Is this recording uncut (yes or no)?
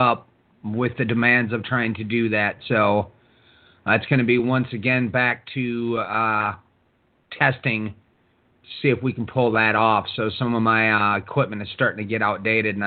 yes